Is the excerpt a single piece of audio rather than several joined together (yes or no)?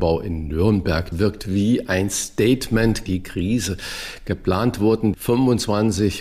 no